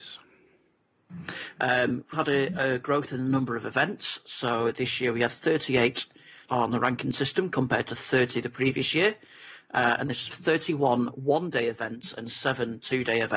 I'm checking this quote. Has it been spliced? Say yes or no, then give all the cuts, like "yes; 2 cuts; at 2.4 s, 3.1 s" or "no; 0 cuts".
yes; 3 cuts; at 2.1 s, 6.5 s, 10.3 s